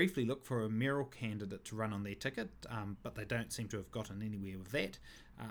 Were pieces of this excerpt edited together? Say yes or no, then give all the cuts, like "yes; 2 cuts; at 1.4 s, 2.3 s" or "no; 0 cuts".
no; 0 cuts